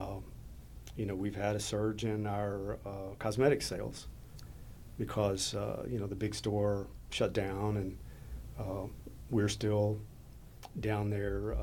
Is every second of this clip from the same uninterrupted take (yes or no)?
yes